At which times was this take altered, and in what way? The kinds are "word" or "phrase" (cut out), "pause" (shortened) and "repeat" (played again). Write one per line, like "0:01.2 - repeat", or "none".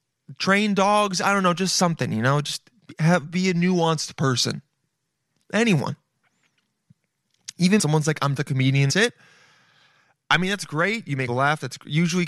0:07.8 - phrase
0:08.4 - word
0:08.9 - phrase
0:11.3 - phrase